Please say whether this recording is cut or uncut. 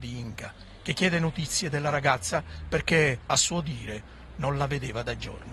uncut